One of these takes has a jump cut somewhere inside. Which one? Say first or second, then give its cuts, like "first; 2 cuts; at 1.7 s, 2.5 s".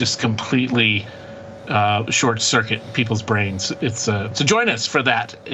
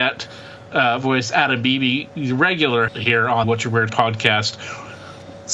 second; 3 cuts; at 2.9 s, 3.4 s, 3.9 s